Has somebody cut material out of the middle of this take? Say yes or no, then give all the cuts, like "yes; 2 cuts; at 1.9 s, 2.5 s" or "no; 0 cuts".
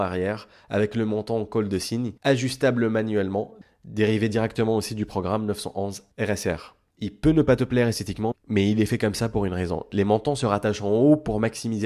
yes; 1 cut; at 2.2 s